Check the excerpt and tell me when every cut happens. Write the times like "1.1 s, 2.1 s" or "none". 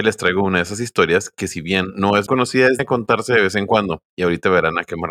2.3 s, 2.8 s, 4.1 s